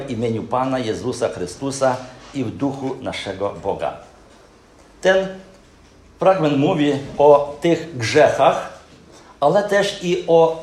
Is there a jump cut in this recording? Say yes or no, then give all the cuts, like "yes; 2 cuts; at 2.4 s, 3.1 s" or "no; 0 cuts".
no; 0 cuts